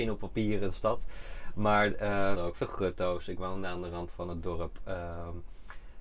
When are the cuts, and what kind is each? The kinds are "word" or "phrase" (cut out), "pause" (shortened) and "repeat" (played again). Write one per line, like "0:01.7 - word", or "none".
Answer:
0:02.4 - phrase